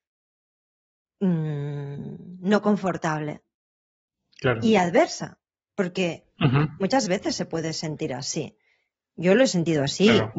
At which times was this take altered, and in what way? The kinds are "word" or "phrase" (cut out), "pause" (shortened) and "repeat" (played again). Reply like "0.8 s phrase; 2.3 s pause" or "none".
none